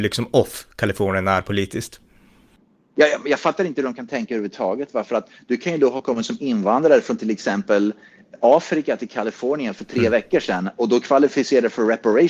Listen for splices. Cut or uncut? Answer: uncut